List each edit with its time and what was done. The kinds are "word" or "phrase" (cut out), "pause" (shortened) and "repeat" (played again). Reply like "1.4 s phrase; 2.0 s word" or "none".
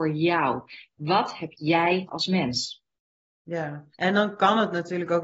2.1 s word; 3.9 s pause